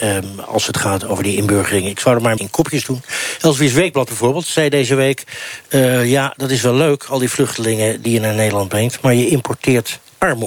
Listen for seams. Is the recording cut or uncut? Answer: cut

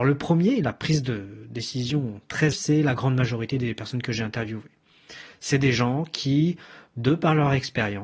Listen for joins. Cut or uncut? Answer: cut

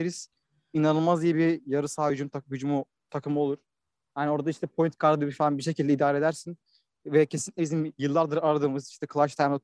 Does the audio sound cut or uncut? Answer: uncut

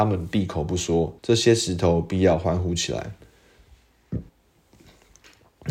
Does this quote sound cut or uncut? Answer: cut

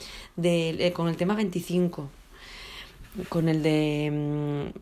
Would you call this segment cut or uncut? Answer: uncut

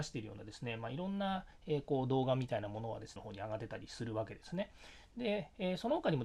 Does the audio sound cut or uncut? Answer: cut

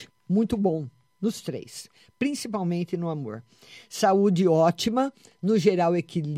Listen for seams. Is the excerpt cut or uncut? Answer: uncut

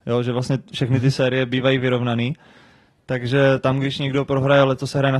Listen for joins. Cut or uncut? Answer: cut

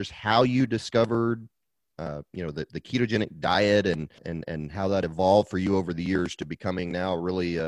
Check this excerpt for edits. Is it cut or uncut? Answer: cut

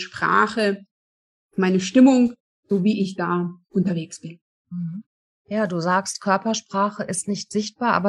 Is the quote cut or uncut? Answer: uncut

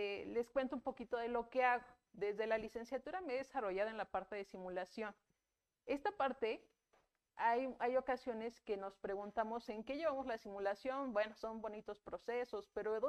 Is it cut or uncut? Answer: uncut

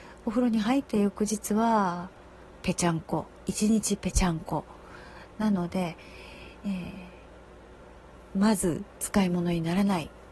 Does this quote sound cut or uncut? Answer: cut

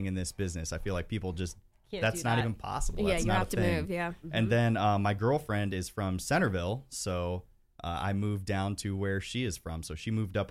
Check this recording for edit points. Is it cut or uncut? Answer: uncut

